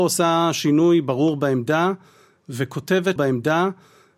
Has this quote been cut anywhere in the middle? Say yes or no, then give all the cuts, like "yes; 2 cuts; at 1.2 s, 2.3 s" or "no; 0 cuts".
yes; 1 cut; at 3.2 s